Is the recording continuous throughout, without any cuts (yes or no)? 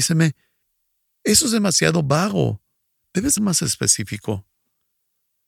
no